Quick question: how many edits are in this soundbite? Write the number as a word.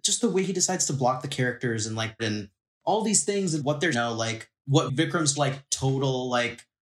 four